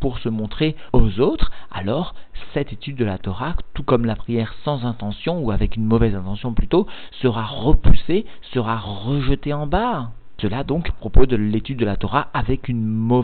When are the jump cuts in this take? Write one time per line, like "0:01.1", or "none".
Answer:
none